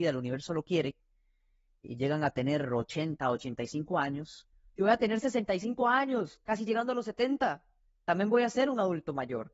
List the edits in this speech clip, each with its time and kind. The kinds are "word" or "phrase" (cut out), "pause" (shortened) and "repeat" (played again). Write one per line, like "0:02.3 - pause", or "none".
none